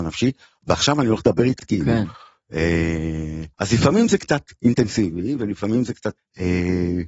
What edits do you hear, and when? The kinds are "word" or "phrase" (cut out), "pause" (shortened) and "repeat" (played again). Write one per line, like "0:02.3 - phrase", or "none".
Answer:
0:01.6 - word
0:03.5 - pause
0:06.2 - word